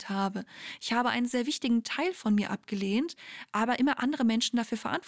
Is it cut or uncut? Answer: uncut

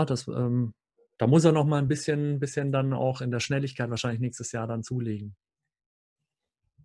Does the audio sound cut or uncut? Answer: uncut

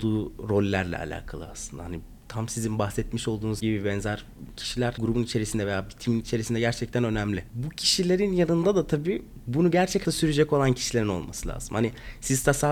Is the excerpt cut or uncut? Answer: cut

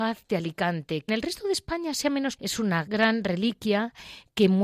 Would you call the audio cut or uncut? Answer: cut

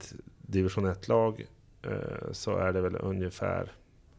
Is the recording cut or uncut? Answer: uncut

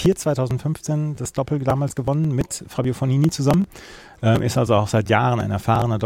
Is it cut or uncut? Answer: uncut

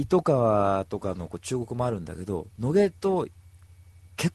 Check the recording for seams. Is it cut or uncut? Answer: uncut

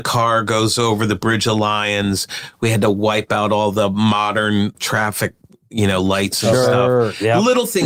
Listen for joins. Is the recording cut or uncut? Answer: cut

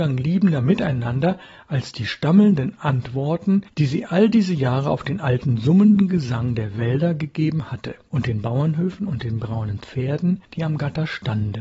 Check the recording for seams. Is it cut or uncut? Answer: uncut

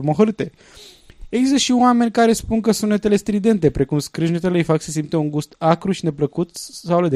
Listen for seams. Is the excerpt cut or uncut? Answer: uncut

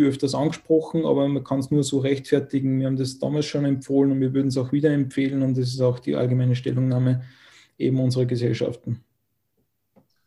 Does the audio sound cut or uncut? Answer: uncut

